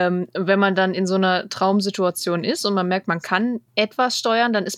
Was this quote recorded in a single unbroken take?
yes; 0 cuts

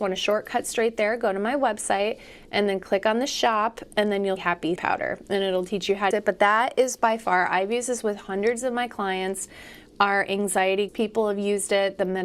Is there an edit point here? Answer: yes; 4 cuts; at 4.4 s, 4.8 s, 6.1 s, 10.9 s

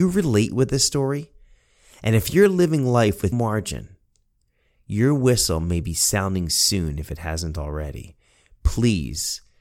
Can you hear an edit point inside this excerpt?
yes; 1 cut; at 3.3 s

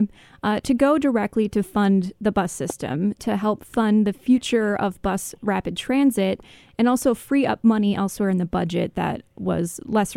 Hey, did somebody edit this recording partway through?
no; 0 cuts

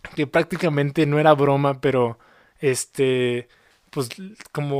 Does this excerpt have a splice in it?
no; 0 cuts

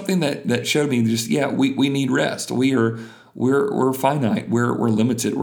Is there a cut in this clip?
no; 0 cuts

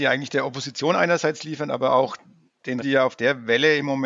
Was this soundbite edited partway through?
yes; 1 cut; at 2.8 s

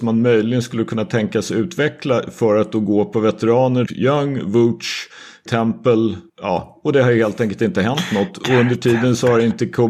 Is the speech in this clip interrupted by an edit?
yes; 3 cuts; at 3.9 s, 5.5 s, 6.3 s

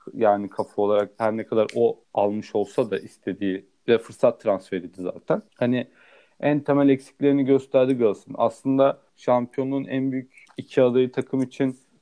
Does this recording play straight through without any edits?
no; 3 cuts; at 2.0 s, 5.5 s, 9.1 s

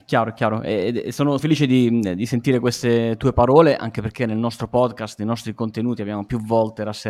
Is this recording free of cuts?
no; 1 cut; at 1.4 s

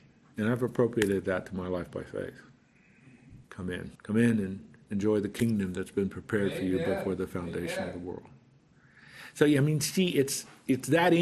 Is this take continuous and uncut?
no; 2 cuts; at 3.4 s, 3.9 s

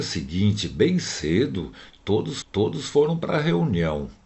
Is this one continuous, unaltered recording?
no; 1 cut; at 2.4 s

